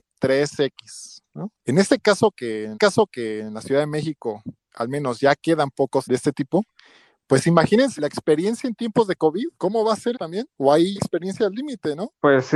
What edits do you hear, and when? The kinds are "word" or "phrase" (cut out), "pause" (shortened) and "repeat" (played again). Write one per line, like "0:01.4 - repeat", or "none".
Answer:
0:01.6 - pause
0:02.7 - repeat
0:04.6 - pause
0:06.0 - word
0:08.0 - word
0:09.5 - pause
0:10.1 - word
0:11.0 - word